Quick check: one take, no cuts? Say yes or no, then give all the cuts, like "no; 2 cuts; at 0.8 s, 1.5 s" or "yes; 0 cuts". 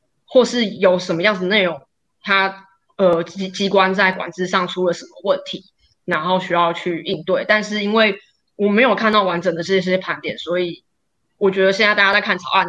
yes; 0 cuts